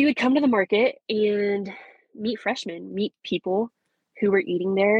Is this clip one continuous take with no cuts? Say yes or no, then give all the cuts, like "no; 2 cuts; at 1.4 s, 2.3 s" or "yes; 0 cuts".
yes; 0 cuts